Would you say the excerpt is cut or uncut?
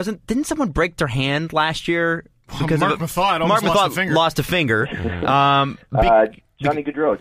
uncut